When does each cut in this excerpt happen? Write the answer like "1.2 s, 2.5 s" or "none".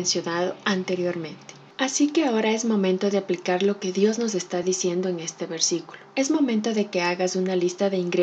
none